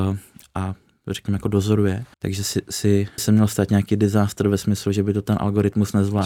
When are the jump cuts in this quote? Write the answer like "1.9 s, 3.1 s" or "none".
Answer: 2.1 s, 3.2 s